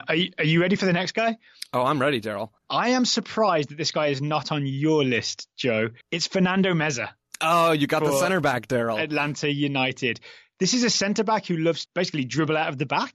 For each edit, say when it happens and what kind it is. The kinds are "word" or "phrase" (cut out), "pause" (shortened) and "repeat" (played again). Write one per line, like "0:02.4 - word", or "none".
0:02.6 - pause
0:06.0 - pause
0:11.9 - word